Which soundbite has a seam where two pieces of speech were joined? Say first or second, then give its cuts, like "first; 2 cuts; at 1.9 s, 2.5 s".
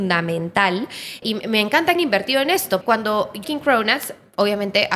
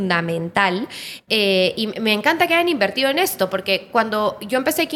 first; 4 cuts; at 1.2 s, 2.0 s, 2.8 s, 3.4 s